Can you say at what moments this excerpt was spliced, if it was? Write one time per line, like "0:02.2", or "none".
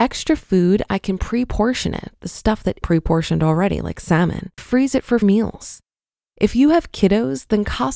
0:02.8
0:04.6
0:05.2